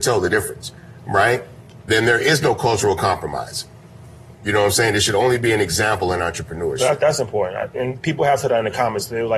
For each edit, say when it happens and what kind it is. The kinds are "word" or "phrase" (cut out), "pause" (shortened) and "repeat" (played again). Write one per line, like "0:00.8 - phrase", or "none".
none